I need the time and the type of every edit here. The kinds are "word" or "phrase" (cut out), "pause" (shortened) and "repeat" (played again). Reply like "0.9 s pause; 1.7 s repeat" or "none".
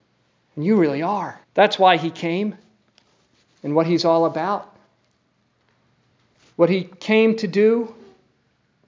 1.4 s pause